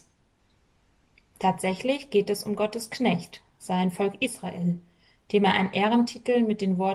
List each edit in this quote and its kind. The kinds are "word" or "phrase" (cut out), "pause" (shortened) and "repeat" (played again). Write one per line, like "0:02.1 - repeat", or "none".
none